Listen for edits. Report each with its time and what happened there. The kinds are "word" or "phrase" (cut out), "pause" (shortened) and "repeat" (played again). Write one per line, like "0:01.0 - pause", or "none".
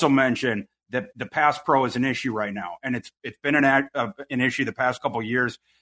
none